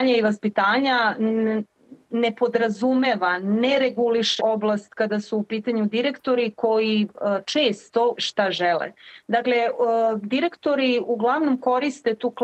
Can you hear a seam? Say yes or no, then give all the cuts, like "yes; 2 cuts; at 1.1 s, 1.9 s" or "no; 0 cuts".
yes; 2 cuts; at 4.4 s, 8.1 s